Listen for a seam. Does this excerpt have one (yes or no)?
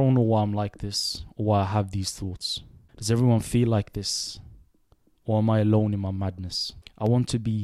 no